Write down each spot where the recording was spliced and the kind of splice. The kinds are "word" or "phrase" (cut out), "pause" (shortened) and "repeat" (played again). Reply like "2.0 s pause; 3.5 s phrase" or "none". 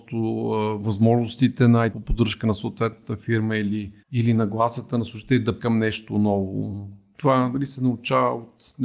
1.9 s phrase; 4.0 s pause; 5.6 s word

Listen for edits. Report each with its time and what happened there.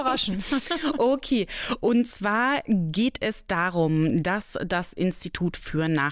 none

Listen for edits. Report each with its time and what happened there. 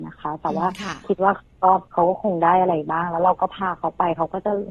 1.9 s pause

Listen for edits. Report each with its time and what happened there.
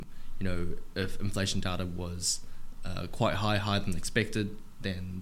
none

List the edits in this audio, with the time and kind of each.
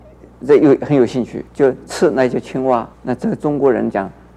1.5 s pause; 2.9 s pause

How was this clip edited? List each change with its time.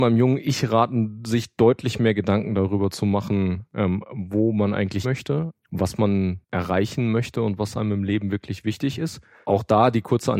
5.0 s word; 6.4 s pause

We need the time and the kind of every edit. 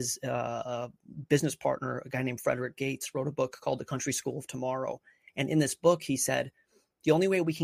none

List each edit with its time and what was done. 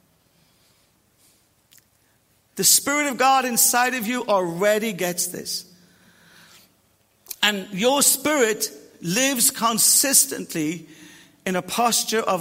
none

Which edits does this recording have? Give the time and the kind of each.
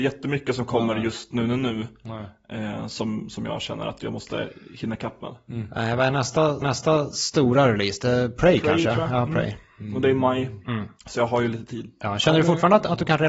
6.6 s repeat; 11.0 s pause

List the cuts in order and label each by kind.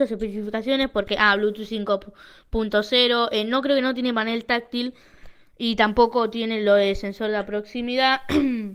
none

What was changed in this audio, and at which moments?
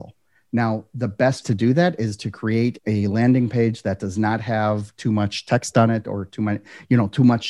1.4 s word; 2.8 s word

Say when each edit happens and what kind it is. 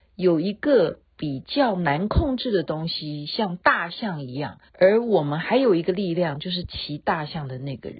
4.7 s pause

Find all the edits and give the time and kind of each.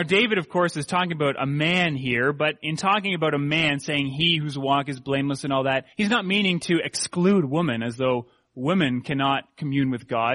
5.9 s pause

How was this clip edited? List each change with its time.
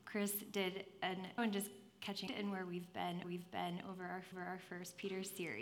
1.4 s phrase; 2.3 s phrase; 3.2 s repeat; 4.3 s repeat

